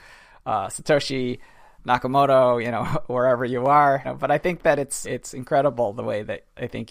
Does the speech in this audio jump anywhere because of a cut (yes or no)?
yes